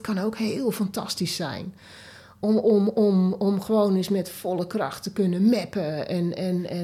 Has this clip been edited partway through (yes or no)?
no